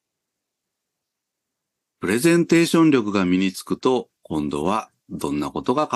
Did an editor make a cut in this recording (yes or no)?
yes